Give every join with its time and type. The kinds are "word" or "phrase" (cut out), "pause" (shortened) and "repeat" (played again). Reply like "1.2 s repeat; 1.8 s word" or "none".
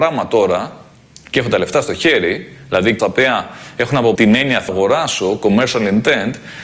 3.0 s word; 4.2 s word; 4.7 s word